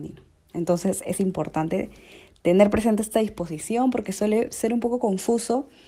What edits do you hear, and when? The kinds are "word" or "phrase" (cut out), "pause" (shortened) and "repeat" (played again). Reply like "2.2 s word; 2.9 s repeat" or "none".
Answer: none